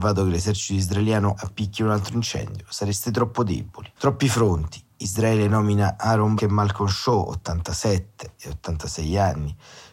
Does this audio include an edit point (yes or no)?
yes